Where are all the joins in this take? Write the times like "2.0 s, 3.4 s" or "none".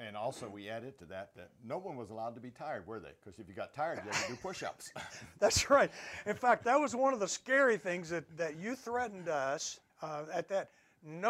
9.9 s